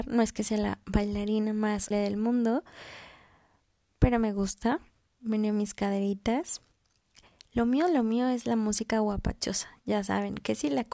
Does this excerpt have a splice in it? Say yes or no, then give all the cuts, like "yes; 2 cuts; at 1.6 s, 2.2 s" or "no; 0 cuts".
yes; 1 cut; at 1.9 s